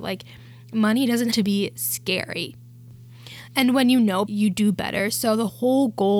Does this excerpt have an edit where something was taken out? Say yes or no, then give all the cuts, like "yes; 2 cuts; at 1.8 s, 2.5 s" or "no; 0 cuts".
yes; 2 cuts; at 1.3 s, 4.3 s